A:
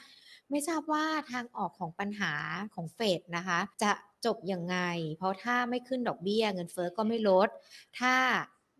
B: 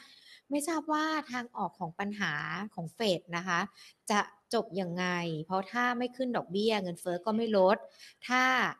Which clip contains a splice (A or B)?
A